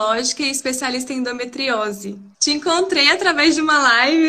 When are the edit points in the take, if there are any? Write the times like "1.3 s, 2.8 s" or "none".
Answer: 2.3 s